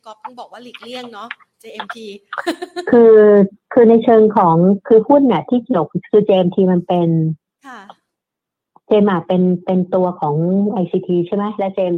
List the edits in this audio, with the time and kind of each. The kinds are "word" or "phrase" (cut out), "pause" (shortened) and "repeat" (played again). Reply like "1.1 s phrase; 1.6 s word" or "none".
none